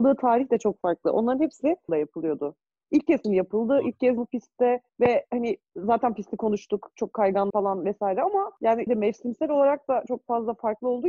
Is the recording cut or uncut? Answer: cut